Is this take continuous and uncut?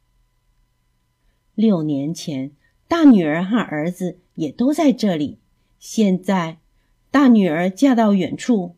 yes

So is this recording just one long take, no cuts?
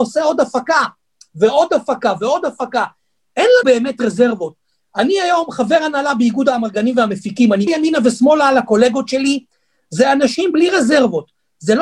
no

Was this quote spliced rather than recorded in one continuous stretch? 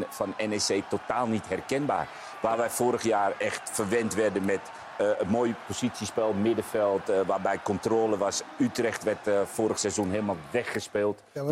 no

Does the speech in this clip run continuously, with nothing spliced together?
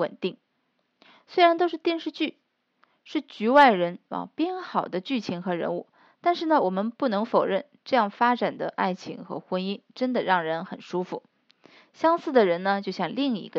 yes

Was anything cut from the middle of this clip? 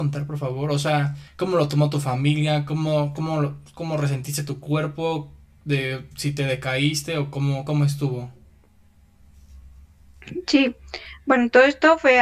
yes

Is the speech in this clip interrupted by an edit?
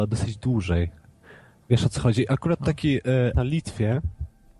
yes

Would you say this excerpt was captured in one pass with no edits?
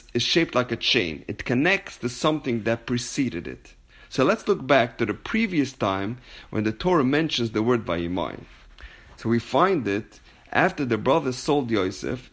yes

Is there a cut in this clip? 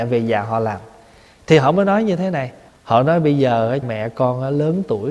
yes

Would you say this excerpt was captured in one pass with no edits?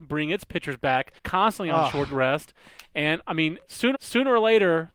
no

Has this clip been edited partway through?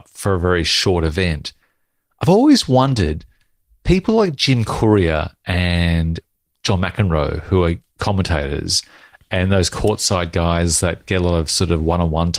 no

